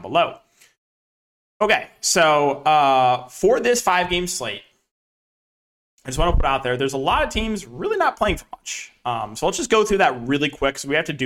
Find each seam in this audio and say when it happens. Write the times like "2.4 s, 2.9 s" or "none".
none